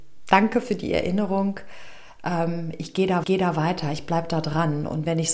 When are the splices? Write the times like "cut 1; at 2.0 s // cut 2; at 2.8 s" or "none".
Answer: cut 1; at 3.2 s